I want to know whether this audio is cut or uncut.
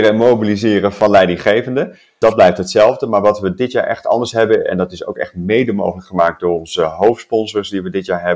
uncut